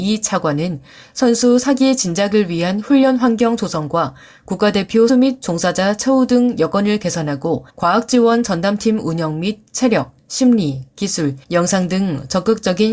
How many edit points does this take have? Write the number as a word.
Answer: three